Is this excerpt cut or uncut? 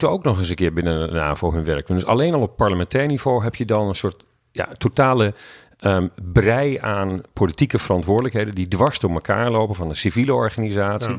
uncut